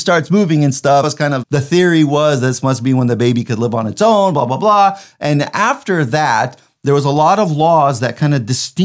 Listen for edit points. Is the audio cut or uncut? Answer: cut